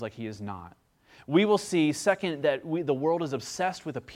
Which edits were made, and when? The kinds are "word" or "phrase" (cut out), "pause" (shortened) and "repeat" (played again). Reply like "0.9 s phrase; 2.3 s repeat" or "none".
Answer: none